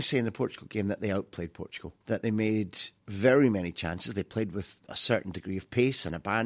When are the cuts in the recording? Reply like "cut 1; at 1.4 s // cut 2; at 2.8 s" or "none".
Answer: cut 1; at 2.0 s // cut 2; at 3.0 s // cut 3; at 4.8 s